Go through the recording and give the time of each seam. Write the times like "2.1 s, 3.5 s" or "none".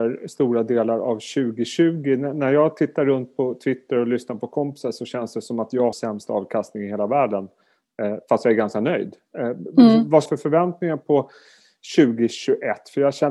5.9 s, 10.3 s